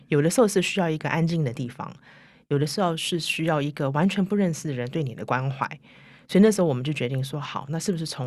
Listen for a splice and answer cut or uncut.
uncut